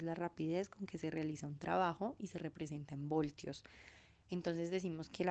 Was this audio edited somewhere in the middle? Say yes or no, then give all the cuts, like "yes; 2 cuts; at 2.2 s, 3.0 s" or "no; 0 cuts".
no; 0 cuts